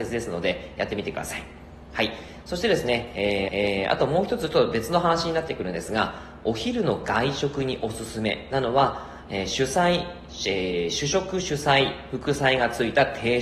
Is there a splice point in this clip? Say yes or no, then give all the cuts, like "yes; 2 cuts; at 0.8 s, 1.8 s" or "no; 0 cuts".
yes; 1 cut; at 3.5 s